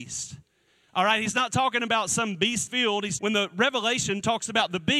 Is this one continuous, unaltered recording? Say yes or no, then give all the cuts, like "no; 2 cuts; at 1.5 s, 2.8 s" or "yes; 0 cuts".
no; 2 cuts; at 2.7 s, 3.2 s